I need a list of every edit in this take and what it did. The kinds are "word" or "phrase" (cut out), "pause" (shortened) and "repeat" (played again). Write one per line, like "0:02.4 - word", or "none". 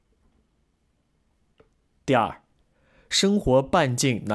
none